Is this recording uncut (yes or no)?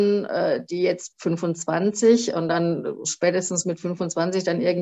no